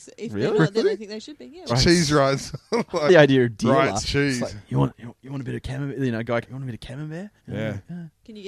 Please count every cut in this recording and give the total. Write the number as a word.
five